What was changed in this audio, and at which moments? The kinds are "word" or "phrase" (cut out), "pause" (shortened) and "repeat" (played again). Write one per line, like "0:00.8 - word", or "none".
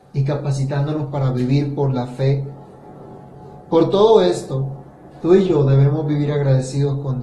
0:05.1 - pause